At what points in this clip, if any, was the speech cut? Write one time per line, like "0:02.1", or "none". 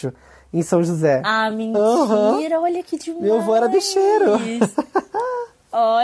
none